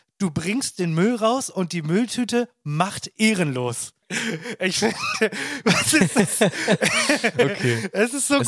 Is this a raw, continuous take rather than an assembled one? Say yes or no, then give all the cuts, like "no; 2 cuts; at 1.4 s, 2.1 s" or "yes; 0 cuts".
yes; 0 cuts